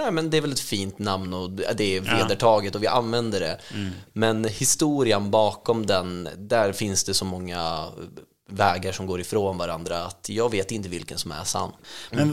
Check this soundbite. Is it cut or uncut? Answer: uncut